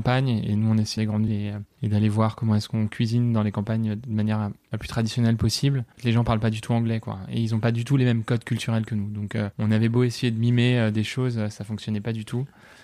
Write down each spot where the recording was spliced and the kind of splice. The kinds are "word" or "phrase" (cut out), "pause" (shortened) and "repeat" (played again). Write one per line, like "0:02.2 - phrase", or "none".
0:01.0 - phrase
0:01.3 - word
0:05.9 - pause

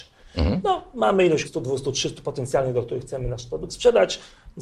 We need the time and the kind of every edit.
0:01.4 - word

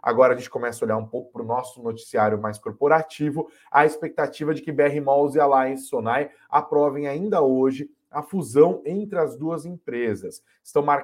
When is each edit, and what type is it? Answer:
none

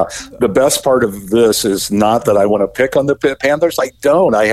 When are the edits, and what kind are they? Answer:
none

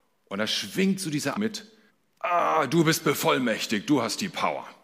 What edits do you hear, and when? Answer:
0:01.3 - word
0:01.9 - pause

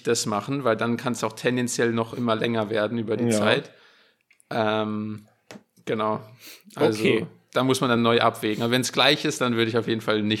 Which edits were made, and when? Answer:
none

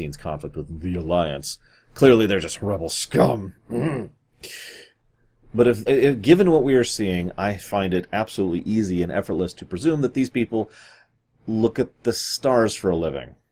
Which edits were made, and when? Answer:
0:05.9 - word

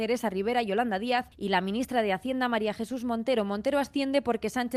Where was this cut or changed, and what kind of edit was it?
0:01.3 - pause

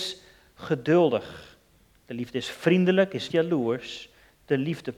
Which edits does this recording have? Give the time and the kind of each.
0:03.3 - word

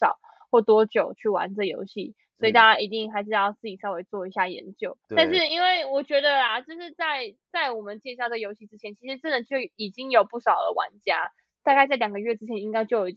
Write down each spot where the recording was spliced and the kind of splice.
0:05.0 - pause

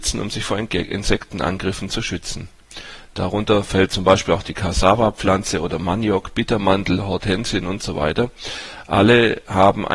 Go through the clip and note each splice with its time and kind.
0:03.1 - pause

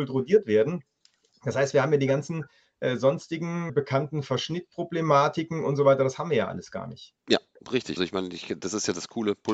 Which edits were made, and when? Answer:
0:03.7 - word
0:07.2 - pause
0:08.0 - word

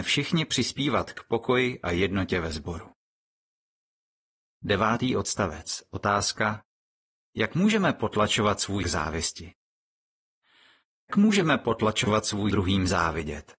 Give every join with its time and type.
0:08.8 - word
0:11.1 - word
0:12.5 - word

